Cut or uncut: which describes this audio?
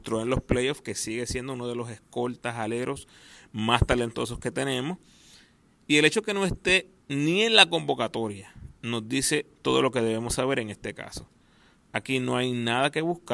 uncut